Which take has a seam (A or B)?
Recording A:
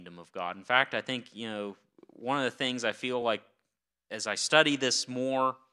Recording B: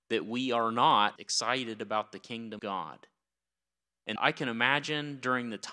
B